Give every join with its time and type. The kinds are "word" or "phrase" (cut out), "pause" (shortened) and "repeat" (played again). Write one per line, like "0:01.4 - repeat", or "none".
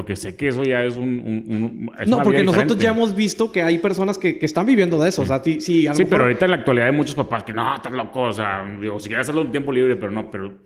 none